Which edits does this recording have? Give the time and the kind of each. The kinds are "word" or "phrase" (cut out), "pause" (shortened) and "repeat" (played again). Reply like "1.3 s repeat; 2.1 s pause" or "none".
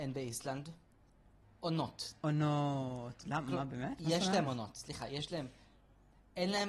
none

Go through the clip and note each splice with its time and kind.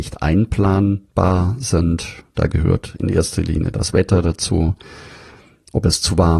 none

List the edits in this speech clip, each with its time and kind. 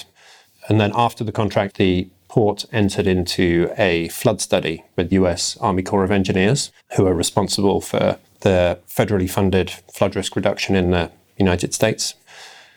1.7 s word; 5.1 s word; 6.8 s pause

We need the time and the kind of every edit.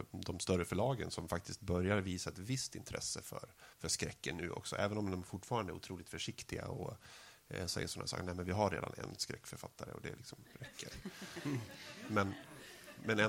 3.7 s pause

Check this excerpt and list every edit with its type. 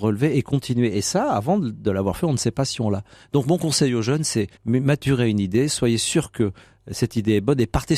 4.6 s pause

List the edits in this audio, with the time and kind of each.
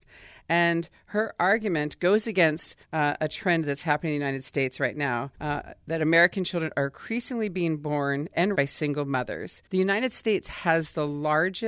2.8 s pause; 5.3 s pause; 8.5 s word; 9.7 s pause

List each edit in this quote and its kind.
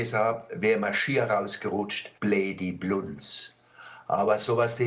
2.2 s pause

